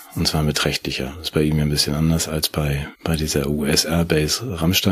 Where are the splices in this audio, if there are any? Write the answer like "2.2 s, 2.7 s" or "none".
2.9 s